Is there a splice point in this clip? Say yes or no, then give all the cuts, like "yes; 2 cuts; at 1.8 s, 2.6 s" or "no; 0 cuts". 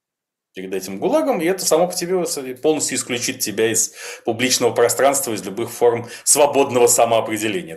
no; 0 cuts